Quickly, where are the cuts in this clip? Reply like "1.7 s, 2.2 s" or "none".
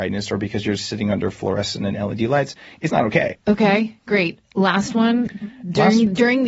2.9 s